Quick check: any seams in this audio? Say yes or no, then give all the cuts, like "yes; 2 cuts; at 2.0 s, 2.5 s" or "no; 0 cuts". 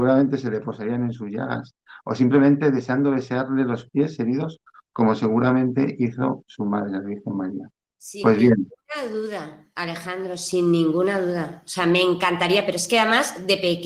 no; 0 cuts